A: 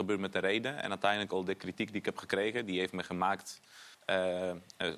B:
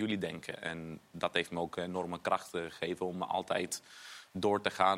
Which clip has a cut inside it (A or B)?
A